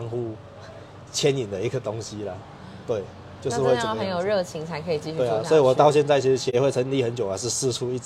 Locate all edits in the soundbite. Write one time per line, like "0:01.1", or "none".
none